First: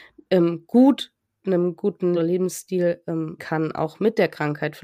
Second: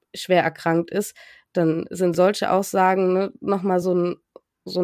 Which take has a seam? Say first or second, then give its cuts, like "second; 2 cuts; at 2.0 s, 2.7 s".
first; 3 cuts; at 1.4 s, 2.1 s, 3.4 s